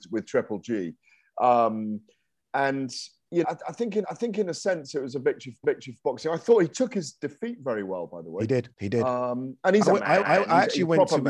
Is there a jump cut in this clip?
yes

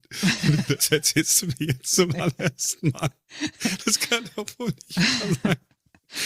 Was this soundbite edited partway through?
no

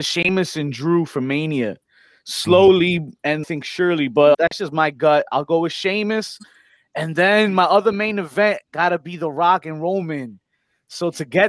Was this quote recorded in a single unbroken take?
no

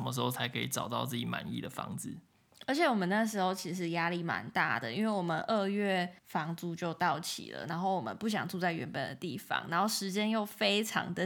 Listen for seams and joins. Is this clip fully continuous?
no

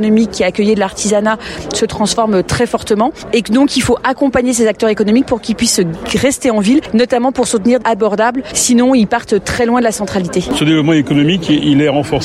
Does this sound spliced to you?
yes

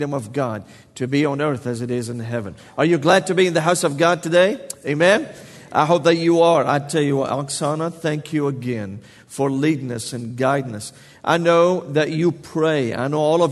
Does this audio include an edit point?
no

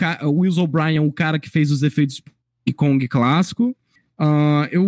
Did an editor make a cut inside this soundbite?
no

